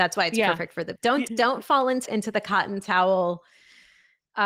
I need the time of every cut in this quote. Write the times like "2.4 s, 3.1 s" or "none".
1.0 s, 1.3 s, 2.1 s